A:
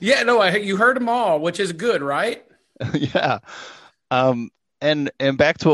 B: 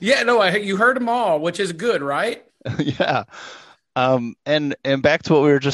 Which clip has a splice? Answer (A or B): B